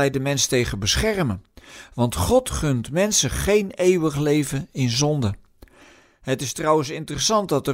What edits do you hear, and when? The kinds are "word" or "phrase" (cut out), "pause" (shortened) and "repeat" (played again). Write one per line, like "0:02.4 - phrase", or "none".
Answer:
none